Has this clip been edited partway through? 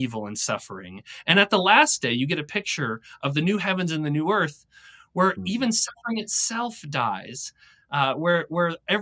no; 0 cuts

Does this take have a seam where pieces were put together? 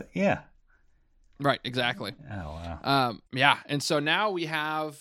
yes; 1 cut; at 3.3 s

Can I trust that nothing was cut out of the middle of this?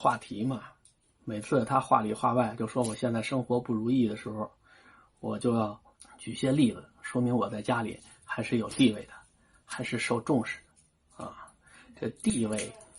yes; 0 cuts

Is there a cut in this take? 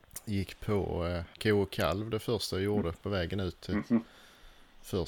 yes; 1 cut; at 1.3 s

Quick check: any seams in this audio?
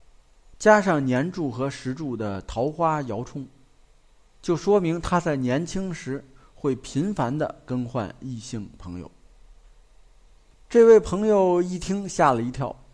no; 0 cuts

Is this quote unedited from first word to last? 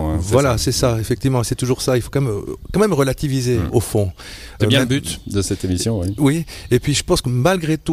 no; 1 cut; at 4.6 s

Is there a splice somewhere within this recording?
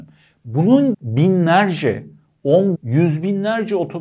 yes; 2 cuts; at 0.9 s, 2.8 s

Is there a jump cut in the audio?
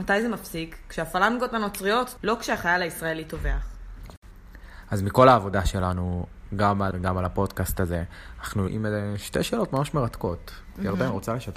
yes; 3 cuts; at 2.2 s, 6.9 s, 8.7 s

